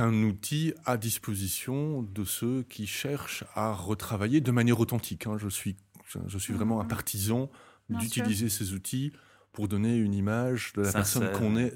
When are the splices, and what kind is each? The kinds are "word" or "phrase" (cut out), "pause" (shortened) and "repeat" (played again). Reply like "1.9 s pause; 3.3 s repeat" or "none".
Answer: none